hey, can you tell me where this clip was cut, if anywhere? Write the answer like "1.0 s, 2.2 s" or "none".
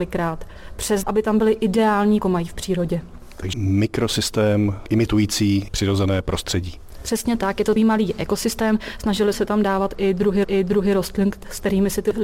1.0 s, 2.2 s, 3.5 s, 5.7 s, 7.8 s, 9.3 s, 10.4 s